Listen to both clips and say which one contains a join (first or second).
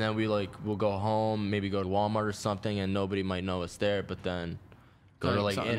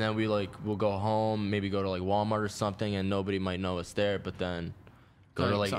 first